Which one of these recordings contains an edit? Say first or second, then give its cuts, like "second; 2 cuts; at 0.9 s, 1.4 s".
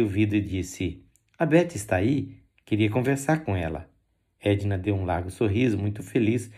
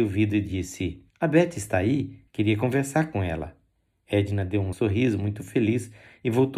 second; 3 cuts; at 1.1 s, 2.3 s, 4.7 s